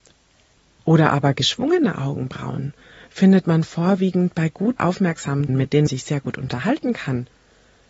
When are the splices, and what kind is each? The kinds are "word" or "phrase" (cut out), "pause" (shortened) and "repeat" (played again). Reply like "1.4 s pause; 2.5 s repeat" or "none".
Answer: 4.8 s word; 5.5 s word; 5.9 s word